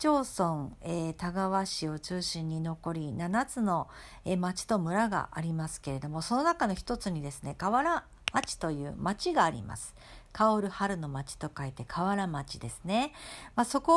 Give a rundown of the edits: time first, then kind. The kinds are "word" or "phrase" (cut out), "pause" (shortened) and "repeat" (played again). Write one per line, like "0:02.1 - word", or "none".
none